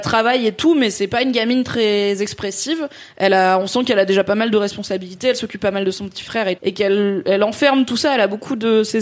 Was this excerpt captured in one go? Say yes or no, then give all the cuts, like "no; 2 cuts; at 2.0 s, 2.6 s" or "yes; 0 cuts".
no; 1 cut; at 6.6 s